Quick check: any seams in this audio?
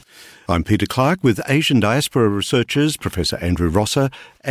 no; 0 cuts

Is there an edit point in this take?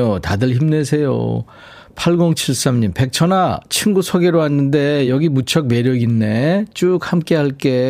no; 0 cuts

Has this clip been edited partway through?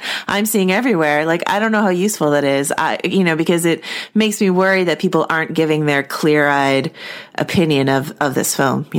no; 0 cuts

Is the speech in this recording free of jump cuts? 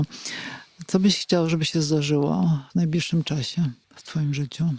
no; 2 cuts; at 2.7 s, 3.8 s

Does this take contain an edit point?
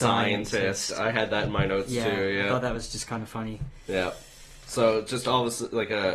no; 0 cuts

